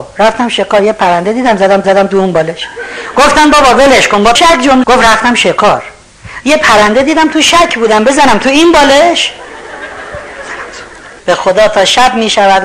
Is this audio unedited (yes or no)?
no